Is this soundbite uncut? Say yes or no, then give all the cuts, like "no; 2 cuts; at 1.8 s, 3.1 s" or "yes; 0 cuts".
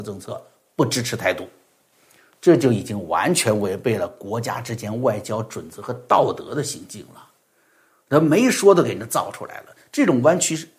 yes; 0 cuts